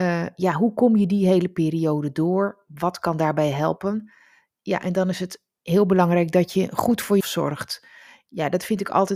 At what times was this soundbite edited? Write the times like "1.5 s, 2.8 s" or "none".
7.2 s